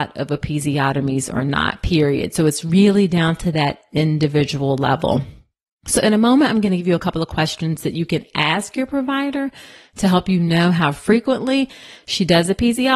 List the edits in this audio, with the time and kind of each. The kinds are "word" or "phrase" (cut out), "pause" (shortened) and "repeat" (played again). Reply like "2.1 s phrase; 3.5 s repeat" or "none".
none